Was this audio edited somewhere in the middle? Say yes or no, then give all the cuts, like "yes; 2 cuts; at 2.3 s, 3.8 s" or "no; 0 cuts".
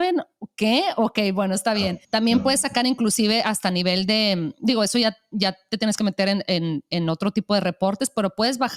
yes; 1 cut; at 2.0 s